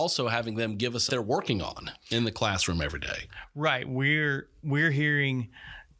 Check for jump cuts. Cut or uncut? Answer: cut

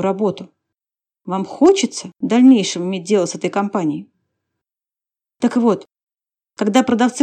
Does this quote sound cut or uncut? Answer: cut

